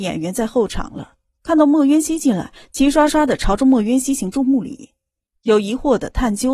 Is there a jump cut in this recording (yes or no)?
no